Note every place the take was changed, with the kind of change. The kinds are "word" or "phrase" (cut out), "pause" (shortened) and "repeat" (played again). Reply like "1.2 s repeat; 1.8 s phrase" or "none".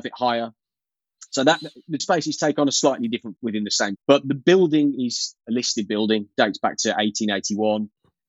2.0 s word; 3.4 s word; 4.0 s word